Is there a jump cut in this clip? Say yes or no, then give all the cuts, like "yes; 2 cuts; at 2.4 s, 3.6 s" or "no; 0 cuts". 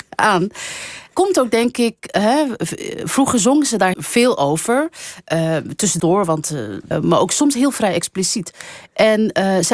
yes; 4 cuts; at 1.1 s, 3.9 s, 6.0 s, 6.9 s